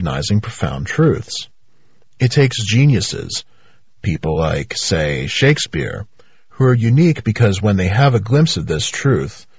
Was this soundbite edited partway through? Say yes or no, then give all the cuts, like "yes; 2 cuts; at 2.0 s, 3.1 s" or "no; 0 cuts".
no; 0 cuts